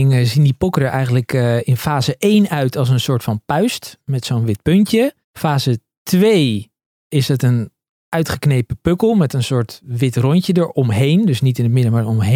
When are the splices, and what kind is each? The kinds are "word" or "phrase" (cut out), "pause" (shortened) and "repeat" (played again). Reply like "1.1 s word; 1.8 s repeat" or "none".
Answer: 5.2 s pause